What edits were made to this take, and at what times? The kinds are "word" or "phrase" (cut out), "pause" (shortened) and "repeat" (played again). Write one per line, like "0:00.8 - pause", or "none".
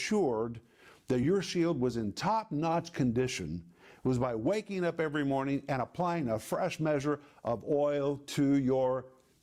none